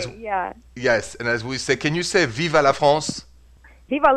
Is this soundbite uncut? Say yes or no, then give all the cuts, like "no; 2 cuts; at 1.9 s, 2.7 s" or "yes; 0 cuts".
yes; 0 cuts